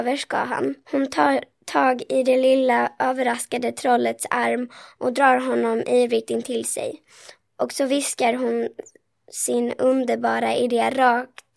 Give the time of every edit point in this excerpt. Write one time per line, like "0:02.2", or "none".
none

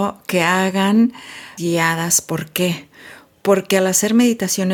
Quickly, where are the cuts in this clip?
0:01.6

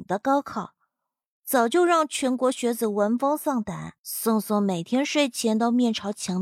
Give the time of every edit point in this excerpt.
0:04.0

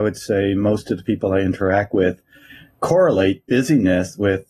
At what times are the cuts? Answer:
none

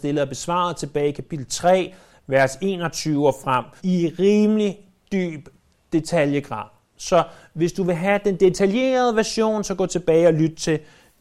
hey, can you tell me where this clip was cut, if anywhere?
0:03.8

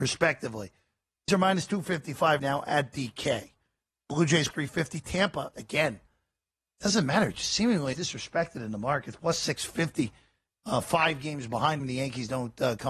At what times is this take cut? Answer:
0:01.3
0:02.4
0:04.5
0:05.5
0:07.9
0:11.8

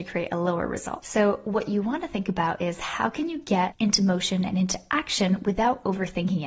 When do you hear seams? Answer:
none

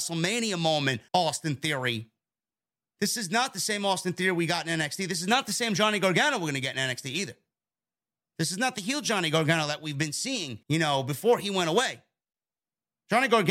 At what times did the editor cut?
0:01.1
0:10.6

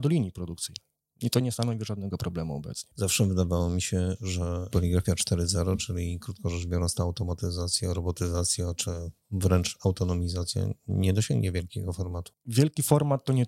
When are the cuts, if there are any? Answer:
none

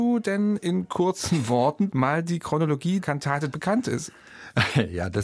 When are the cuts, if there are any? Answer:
0:01.9
0:03.0
0:03.5

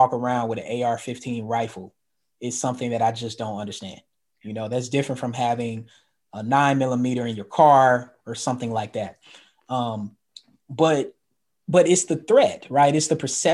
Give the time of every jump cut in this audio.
none

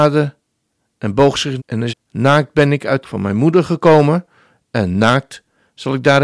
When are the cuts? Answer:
0:01.6
0:01.9
0:03.0

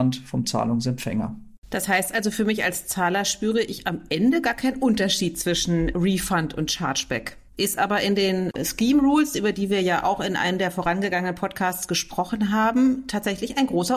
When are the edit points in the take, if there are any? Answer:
0:05.9
0:07.5

